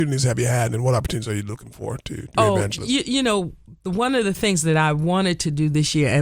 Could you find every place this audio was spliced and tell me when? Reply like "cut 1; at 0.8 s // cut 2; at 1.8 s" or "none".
none